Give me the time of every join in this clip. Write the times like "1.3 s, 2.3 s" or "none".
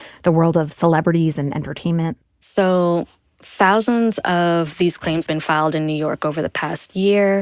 2.2 s, 5.3 s